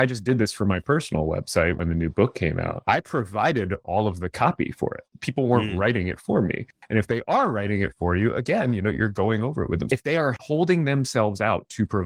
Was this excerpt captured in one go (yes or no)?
yes